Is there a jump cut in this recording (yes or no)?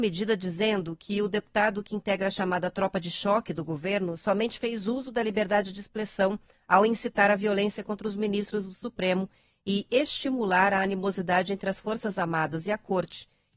no